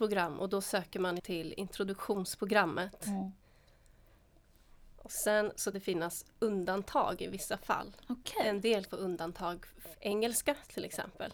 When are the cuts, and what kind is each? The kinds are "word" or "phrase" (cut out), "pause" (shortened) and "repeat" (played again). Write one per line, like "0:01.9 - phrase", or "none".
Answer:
0:01.2 - word
0:05.7 - word
0:08.9 - word
0:09.9 - word